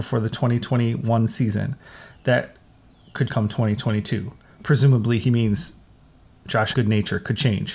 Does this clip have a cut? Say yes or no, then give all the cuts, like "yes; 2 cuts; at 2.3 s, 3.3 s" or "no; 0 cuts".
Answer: yes; 2 cuts; at 3.3 s, 6.7 s